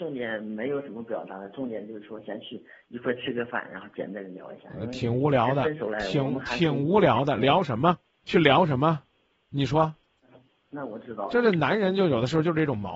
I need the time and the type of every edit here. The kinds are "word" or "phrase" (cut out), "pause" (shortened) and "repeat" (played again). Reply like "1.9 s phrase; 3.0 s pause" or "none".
none